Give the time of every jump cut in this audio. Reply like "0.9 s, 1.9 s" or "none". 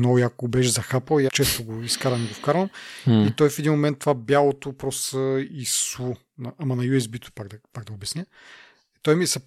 1.3 s